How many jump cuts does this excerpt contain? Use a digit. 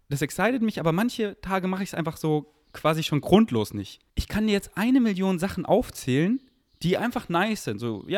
1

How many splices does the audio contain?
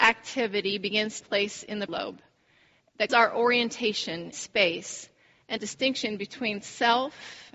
5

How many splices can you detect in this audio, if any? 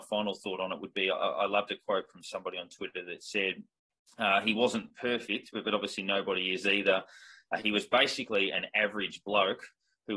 0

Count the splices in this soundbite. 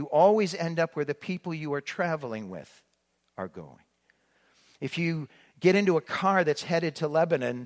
0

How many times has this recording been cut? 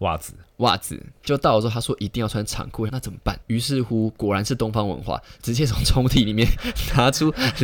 2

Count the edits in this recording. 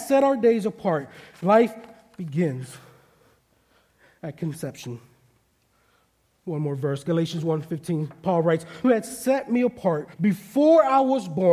2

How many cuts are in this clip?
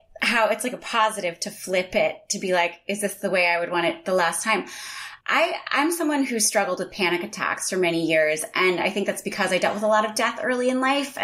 1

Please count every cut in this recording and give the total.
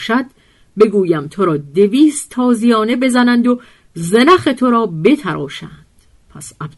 0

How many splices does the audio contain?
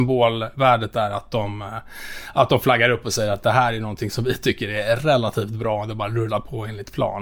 0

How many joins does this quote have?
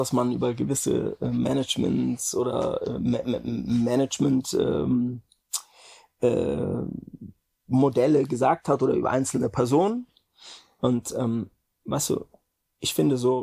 0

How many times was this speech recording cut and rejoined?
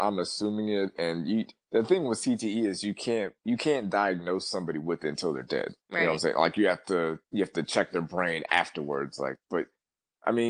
3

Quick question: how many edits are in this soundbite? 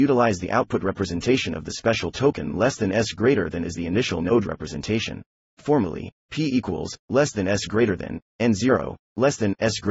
1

